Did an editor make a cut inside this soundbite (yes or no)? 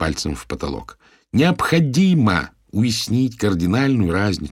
no